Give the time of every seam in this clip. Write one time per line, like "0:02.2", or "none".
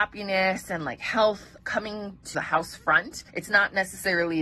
0:01.6
0:02.3
0:03.3